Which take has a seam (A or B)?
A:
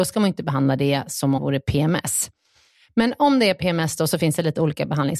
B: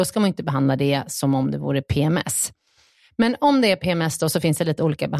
A